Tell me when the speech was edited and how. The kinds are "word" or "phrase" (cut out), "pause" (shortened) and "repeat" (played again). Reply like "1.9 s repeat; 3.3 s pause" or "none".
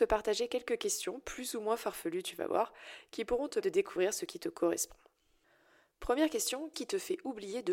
3.6 s word; 6.7 s word